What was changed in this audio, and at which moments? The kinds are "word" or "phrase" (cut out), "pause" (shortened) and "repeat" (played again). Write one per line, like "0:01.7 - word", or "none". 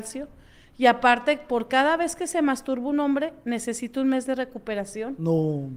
none